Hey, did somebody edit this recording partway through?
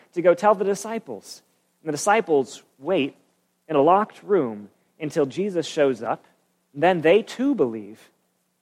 no; 0 cuts

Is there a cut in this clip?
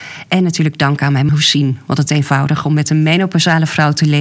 yes; 2 cuts; at 1.3 s, 2.1 s

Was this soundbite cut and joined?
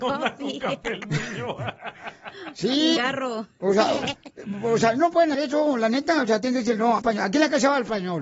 yes; 3 cuts; at 3.0 s, 5.3 s, 7.0 s

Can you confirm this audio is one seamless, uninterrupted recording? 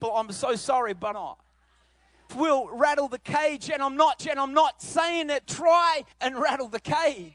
no; 5 cuts; at 1.1 s, 2.3 s, 4.2 s, 5.4 s, 6.1 s

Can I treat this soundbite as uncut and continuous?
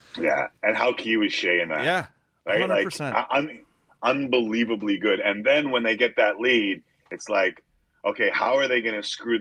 yes; 0 cuts

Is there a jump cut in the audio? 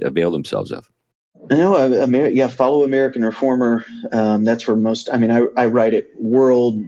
no; 0 cuts

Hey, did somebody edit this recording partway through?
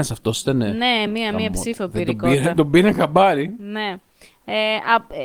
no; 0 cuts

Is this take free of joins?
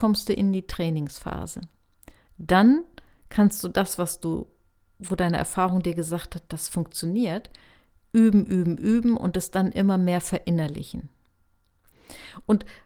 yes; 0 cuts

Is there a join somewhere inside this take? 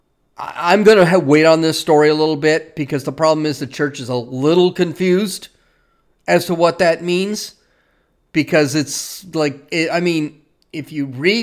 no; 0 cuts

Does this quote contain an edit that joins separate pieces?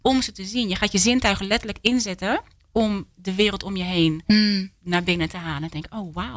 no; 0 cuts

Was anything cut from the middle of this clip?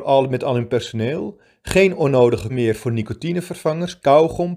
yes; 1 cut; at 2.5 s

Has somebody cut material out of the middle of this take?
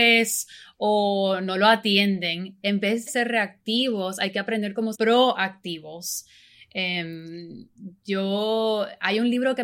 yes; 2 cuts; at 3.1 s, 4.9 s

